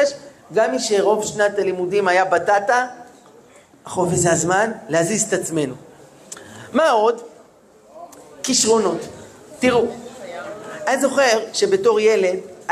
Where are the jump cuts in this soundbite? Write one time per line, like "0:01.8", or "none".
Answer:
none